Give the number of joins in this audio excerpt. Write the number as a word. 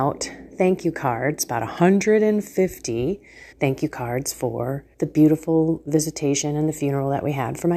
two